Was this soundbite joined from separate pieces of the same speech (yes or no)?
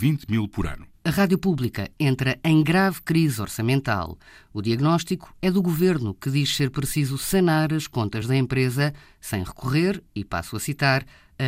no